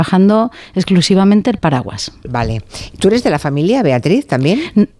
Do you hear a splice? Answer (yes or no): no